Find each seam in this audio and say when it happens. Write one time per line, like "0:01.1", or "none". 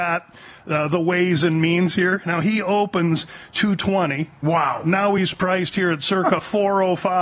none